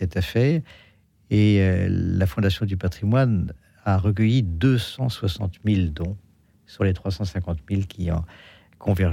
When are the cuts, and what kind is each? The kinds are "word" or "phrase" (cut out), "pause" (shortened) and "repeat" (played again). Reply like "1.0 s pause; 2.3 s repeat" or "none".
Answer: none